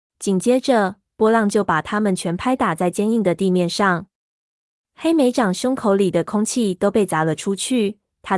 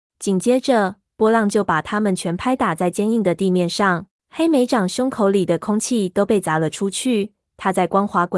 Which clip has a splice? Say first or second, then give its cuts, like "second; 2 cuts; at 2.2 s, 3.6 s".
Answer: second; 1 cut; at 4.1 s